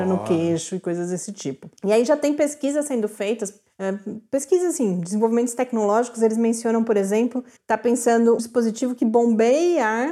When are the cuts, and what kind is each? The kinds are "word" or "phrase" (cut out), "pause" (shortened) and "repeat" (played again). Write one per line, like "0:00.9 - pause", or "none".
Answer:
0:01.8 - pause
0:07.6 - word
0:08.4 - word